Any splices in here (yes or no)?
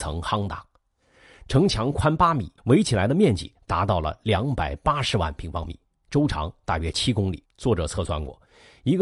yes